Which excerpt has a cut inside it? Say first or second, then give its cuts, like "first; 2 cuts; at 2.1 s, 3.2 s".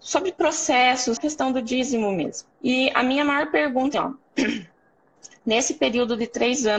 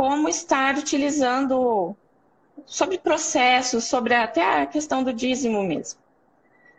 first; 3 cuts; at 1.2 s, 2.5 s, 3.9 s